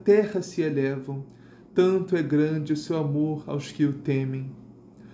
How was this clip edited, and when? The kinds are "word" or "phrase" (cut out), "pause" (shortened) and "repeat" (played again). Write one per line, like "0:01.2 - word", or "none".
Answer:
none